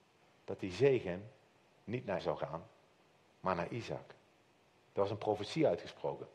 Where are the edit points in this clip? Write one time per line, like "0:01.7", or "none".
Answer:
0:02.2